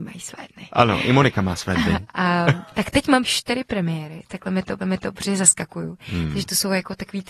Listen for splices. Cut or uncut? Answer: cut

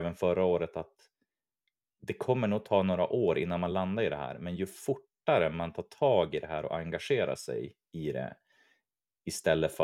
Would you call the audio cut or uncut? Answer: uncut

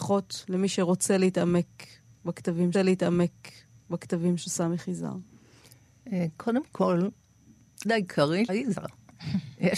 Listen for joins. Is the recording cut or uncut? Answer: cut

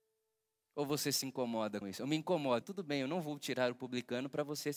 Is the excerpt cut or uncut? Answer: cut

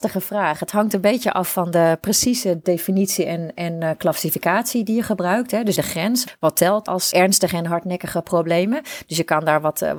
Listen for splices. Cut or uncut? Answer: cut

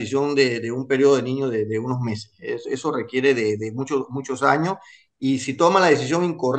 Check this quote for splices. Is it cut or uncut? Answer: uncut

